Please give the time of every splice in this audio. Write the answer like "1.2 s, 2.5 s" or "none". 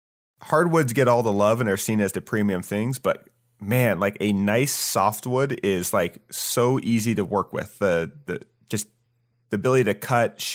none